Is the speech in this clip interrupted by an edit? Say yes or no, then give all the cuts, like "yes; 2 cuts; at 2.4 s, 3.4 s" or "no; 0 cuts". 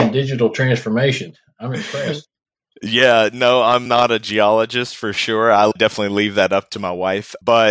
no; 0 cuts